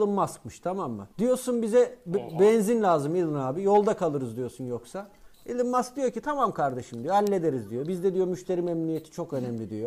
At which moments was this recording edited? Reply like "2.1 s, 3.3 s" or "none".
1.1 s